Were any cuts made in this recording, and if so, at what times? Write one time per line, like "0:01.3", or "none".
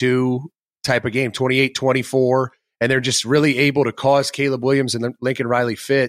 none